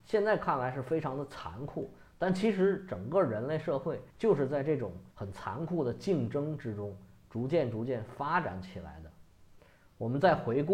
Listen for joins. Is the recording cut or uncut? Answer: cut